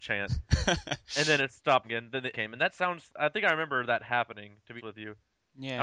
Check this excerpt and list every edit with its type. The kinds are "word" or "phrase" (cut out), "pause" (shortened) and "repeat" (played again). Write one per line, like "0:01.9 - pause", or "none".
0:01.8 - word
0:02.3 - word
0:03.1 - word
0:04.8 - word